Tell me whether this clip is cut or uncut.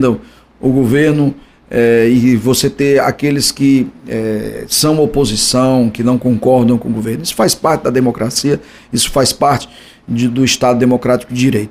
uncut